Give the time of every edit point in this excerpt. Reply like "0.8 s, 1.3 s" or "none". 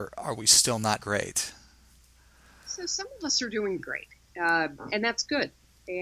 1.0 s, 3.8 s